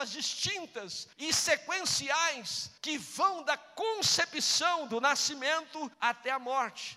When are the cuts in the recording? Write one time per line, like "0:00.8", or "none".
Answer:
0:01.1
0:02.8
0:05.9